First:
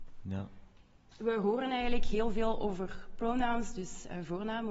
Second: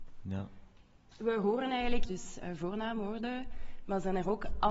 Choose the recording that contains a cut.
second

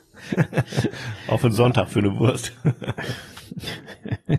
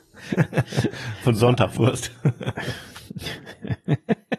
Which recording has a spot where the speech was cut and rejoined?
second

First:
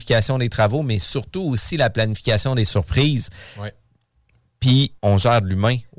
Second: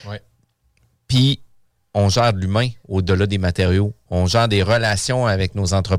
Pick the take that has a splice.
first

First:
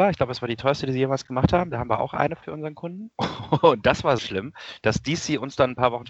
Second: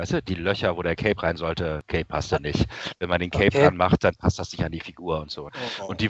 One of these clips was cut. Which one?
first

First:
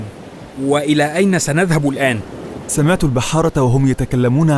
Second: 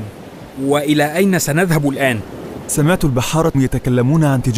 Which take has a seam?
second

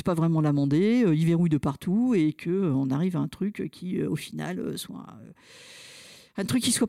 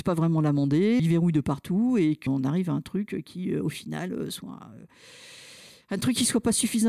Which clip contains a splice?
second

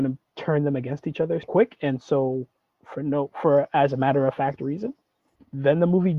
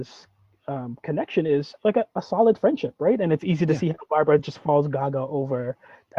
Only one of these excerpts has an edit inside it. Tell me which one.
first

